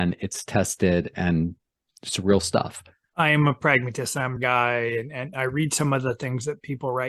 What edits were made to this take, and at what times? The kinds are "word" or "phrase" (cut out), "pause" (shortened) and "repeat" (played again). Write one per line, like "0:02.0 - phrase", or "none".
0:04.4 - phrase